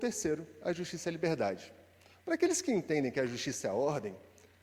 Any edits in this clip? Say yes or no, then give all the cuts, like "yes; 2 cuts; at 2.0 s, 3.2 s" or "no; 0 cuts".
no; 0 cuts